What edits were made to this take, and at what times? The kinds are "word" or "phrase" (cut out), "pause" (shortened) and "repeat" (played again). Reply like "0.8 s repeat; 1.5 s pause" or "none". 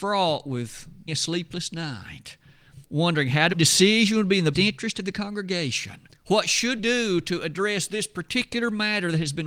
1.1 s word; 2.8 s pause; 3.5 s phrase; 4.5 s word; 6.1 s pause; 6.8 s word

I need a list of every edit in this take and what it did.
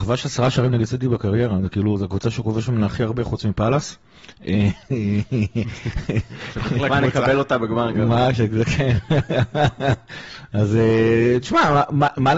none

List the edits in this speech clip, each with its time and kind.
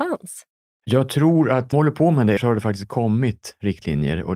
1.7 s word; 2.4 s word

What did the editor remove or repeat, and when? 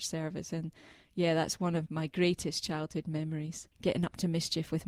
1.9 s word; 3.7 s pause

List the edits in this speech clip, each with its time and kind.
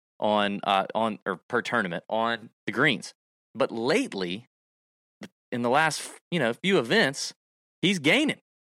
none

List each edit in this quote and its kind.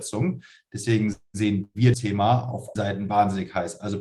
1.9 s word; 2.8 s word

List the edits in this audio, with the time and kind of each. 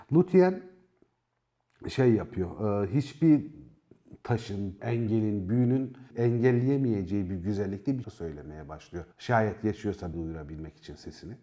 4.8 s word; 6.1 s word; 8.0 s word; 9.1 s pause; 10.1 s word

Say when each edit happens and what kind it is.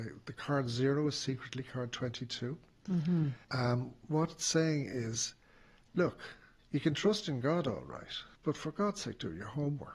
3.4 s pause; 6.6 s pause; 8.3 s pause

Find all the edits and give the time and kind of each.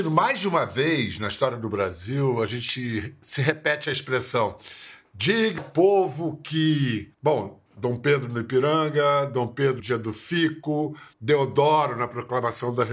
5.6 s word; 7.1 s pause; 9.8 s word; 11.1 s pause

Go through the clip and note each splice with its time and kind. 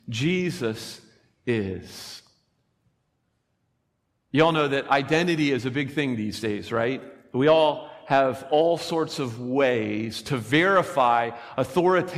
none

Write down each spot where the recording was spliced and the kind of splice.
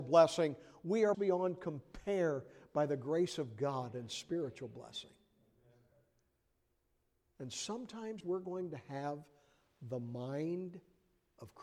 1.1 s word; 8.2 s word

